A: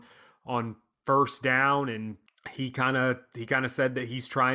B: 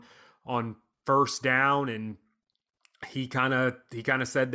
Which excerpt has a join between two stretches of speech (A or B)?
A